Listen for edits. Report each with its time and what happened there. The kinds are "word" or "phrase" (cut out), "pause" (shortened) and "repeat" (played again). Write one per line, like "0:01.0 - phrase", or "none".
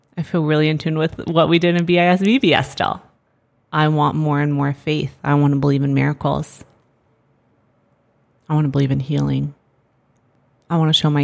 none

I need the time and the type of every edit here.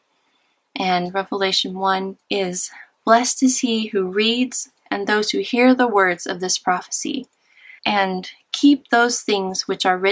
0:02.2 - pause
0:07.8 - pause

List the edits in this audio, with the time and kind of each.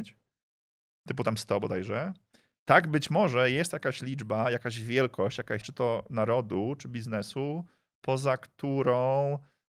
0:05.6 - word

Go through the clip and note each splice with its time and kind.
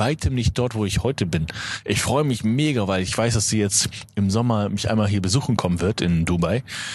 none

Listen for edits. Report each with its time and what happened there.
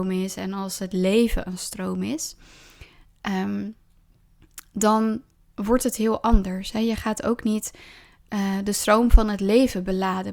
none

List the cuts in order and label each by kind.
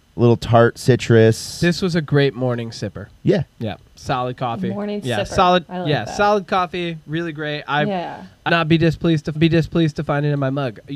0:03.2 - pause
0:08.5 - word
0:09.3 - repeat

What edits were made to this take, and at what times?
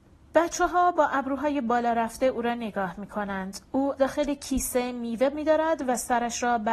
0:04.0 - word
0:05.3 - word

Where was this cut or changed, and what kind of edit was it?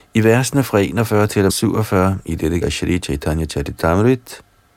0:01.5 - word
0:02.6 - word

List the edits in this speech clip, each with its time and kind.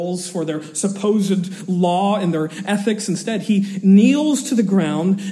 none

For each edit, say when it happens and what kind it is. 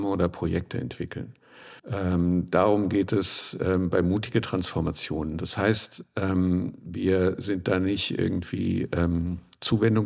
0:01.8 - pause

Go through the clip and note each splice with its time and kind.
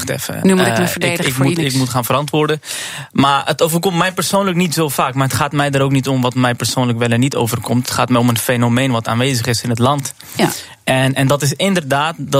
0:01.6 - phrase

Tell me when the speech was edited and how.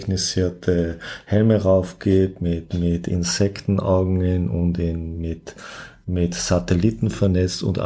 none

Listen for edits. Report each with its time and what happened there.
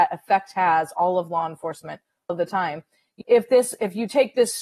0:00.9 - word
0:02.3 - word
0:03.2 - word

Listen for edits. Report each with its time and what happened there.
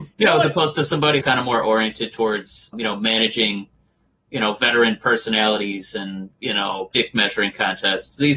0:01.2 - word
0:02.7 - word
0:06.9 - word

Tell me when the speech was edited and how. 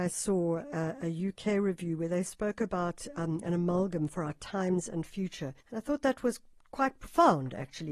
0:03.4 - phrase
0:05.6 - pause

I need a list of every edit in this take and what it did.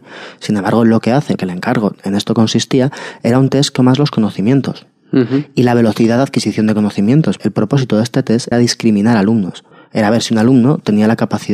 0:01.4 - word
0:03.8 - phrase
0:07.4 - word
0:08.5 - word
0:09.7 - pause

